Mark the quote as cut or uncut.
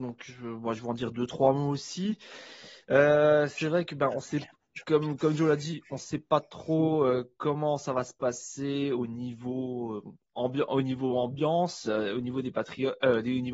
uncut